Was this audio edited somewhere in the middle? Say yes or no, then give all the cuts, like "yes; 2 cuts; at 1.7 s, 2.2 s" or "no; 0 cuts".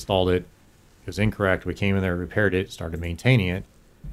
no; 0 cuts